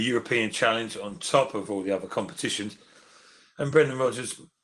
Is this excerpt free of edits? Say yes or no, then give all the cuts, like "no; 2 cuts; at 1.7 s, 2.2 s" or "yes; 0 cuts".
yes; 0 cuts